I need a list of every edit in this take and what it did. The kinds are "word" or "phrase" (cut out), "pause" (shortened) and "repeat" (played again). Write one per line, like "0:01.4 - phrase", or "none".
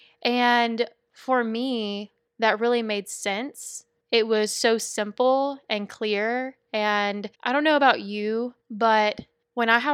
0:04.0 - pause
0:07.3 - pause
0:08.6 - pause